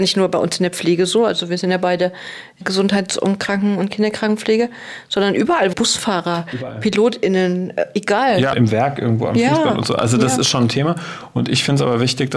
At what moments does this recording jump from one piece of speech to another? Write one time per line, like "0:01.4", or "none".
0:02.6
0:05.7
0:08.5